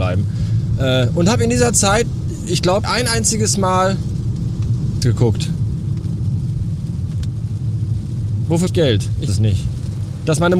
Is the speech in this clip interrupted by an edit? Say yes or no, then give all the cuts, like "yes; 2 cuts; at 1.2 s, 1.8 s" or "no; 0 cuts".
yes; 4 cuts; at 2.8 s, 5.0 s, 8.7 s, 9.3 s